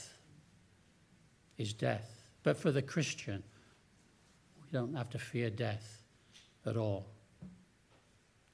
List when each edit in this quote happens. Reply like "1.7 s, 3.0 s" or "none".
none

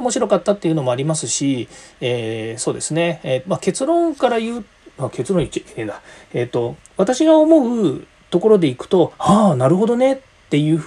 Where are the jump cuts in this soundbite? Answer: 3.4 s, 6.8 s

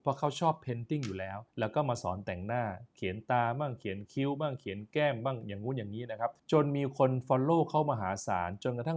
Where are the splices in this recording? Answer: 1.5 s, 6.4 s

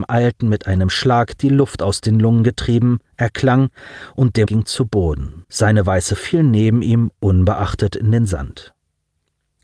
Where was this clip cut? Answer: 4.4 s, 5.5 s, 6.2 s

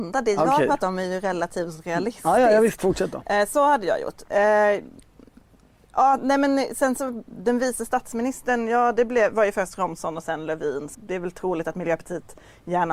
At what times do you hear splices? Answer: 10.9 s

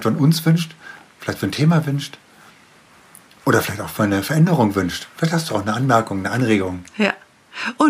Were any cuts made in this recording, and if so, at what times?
none

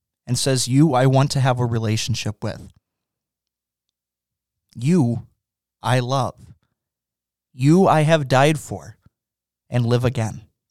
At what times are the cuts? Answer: none

